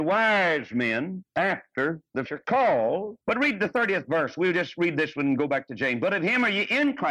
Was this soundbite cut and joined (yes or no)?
yes